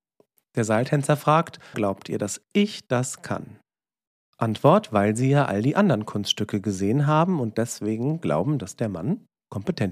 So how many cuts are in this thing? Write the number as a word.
one